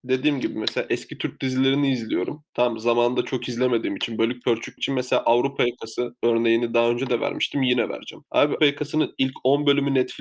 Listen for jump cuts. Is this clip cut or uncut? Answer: cut